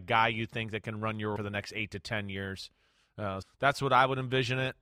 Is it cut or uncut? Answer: cut